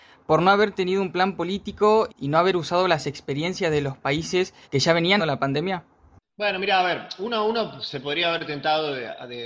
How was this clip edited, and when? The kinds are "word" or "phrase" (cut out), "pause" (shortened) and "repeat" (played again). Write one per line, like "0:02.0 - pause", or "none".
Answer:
0:02.1 - word
0:04.6 - pause
0:05.2 - word
0:06.2 - pause